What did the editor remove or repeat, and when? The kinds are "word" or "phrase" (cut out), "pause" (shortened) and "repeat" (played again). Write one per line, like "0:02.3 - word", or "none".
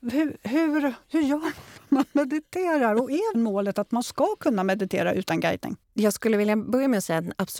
0:03.3 - word
0:05.8 - pause

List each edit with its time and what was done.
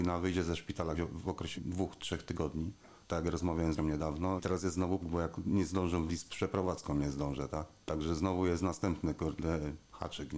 0:01.0 - word
0:01.6 - word
0:03.0 - pause
0:03.8 - word
0:04.4 - word
0:05.0 - phrase
0:06.1 - phrase
0:07.8 - pause

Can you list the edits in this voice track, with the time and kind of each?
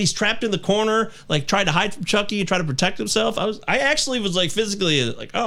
none

